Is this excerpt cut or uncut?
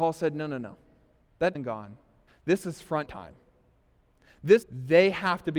cut